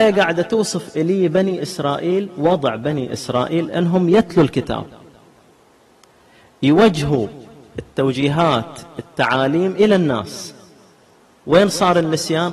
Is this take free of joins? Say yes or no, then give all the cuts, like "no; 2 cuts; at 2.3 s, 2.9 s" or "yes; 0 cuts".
yes; 0 cuts